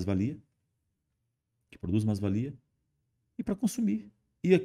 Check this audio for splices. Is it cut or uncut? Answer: uncut